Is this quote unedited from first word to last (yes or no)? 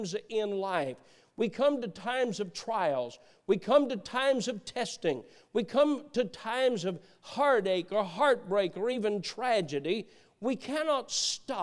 yes